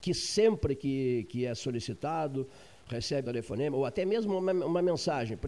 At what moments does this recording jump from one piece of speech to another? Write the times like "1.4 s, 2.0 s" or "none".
3.2 s